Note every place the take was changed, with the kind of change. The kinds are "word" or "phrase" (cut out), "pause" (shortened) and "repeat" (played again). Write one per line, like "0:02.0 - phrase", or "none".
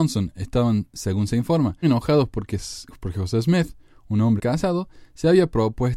0:01.8 - word
0:04.4 - word